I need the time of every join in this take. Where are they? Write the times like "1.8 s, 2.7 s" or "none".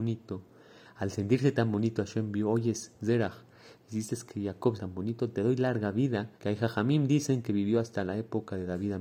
4.8 s, 6.3 s